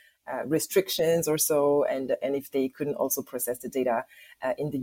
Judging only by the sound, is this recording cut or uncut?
uncut